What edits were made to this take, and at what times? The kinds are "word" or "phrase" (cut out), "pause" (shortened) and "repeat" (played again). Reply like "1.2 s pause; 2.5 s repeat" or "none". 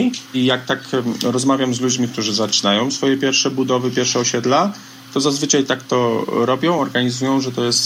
none